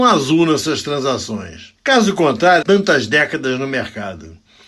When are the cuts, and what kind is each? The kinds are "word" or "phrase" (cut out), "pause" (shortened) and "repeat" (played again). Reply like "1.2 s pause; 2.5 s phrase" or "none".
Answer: 2.6 s phrase